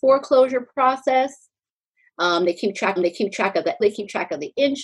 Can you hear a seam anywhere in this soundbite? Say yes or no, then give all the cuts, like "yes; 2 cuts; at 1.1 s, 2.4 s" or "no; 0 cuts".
yes; 2 cuts; at 3.0 s, 3.8 s